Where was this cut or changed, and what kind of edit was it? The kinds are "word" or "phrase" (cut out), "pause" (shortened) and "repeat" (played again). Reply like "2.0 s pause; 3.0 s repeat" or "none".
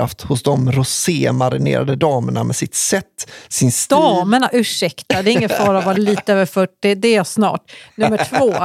none